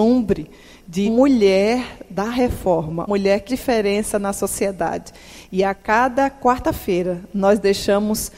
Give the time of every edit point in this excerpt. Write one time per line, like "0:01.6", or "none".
0:01.1
0:03.1
0:03.5